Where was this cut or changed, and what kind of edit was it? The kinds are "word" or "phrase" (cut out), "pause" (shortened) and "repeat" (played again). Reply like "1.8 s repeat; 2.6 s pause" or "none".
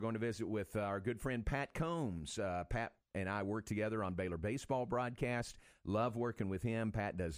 none